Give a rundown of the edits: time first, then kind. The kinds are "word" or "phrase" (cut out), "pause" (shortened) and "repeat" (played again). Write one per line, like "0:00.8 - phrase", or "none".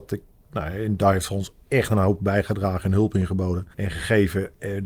0:01.6 - pause
0:03.7 - pause